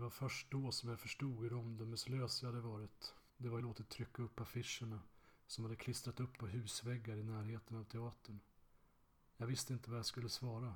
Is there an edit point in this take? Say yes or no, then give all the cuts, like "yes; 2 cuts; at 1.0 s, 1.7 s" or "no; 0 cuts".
yes; 3 cuts; at 3.3 s, 3.6 s, 6.4 s